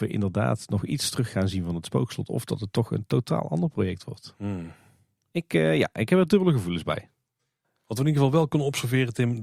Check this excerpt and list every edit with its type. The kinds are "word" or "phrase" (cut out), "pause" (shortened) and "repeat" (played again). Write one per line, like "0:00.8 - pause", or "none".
none